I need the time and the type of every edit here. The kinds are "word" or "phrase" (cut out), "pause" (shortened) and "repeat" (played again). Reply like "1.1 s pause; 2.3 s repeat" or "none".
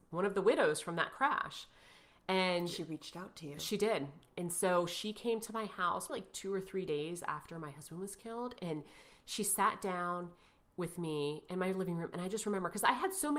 6.1 s word